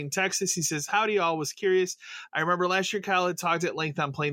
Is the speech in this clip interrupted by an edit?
no; 0 cuts

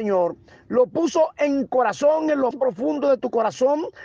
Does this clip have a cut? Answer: yes; 2 cuts; at 1.7 s, 2.5 s

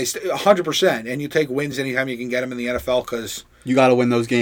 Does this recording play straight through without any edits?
yes; 0 cuts

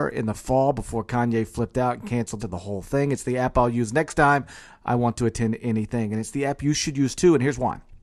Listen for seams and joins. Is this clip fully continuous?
no; 1 cut; at 2.4 s

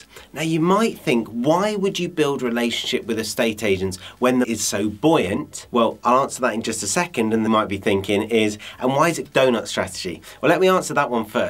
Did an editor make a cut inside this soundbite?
yes; 3 cuts; at 4.4 s, 7.5 s, 9.3 s

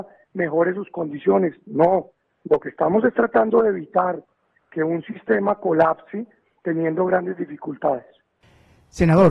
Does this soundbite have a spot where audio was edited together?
no; 0 cuts

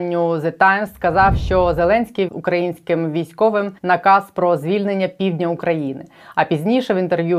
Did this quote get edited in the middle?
yes; 2 cuts; at 2.3 s, 3.8 s

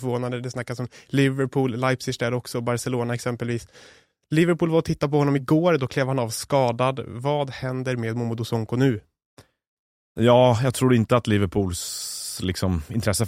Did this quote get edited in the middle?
no; 0 cuts

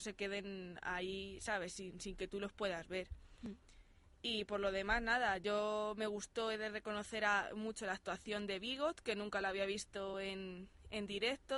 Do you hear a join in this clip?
no; 0 cuts

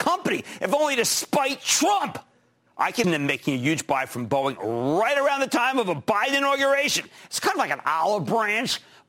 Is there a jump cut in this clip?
yes; 1 cut; at 3.0 s

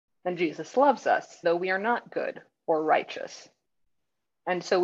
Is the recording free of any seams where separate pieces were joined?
no; 1 cut; at 1.4 s

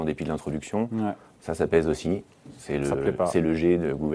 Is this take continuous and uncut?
yes; 0 cuts

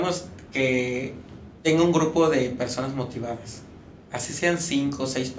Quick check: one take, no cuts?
no; 1 cut; at 1.6 s

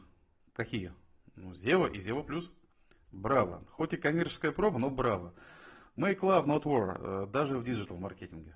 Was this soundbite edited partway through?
no; 0 cuts

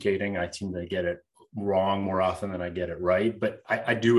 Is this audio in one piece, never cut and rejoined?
yes; 0 cuts

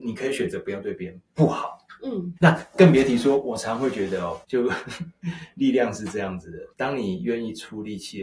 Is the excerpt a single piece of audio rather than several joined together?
no; 3 cuts; at 2.4 s, 4.4 s, 6.7 s

